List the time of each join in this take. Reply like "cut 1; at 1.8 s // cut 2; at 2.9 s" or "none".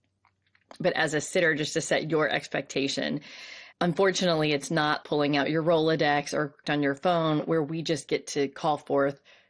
cut 1; at 3.7 s // cut 2; at 5.0 s // cut 3; at 6.6 s

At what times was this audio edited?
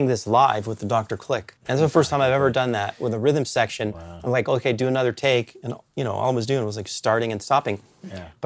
cut 1; at 1.6 s

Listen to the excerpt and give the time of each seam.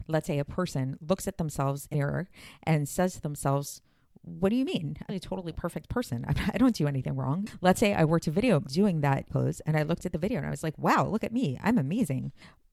cut 1; at 1.9 s // cut 2; at 5.1 s // cut 3; at 8.6 s // cut 4; at 9.3 s

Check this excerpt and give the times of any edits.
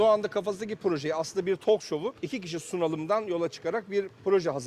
cut 1; at 2.2 s

